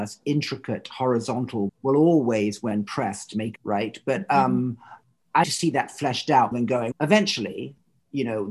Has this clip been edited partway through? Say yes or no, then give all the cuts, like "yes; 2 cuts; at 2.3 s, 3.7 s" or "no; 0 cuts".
yes; 5 cuts; at 1.7 s, 3.6 s, 5.4 s, 6.5 s, 6.9 s